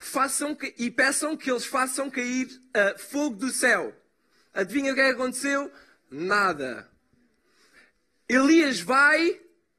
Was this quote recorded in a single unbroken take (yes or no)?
yes